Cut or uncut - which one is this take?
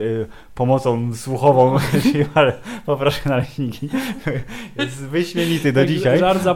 uncut